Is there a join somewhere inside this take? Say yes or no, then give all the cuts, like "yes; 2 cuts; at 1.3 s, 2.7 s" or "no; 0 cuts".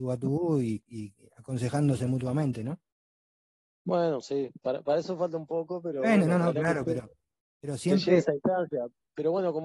no; 0 cuts